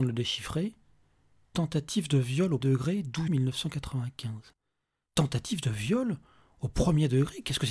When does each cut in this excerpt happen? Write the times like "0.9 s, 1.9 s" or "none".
2.6 s, 3.3 s